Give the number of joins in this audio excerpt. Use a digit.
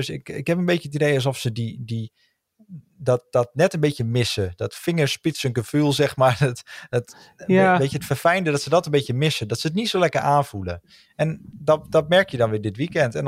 0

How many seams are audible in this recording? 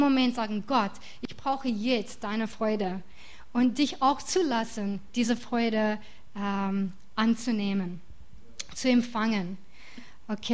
0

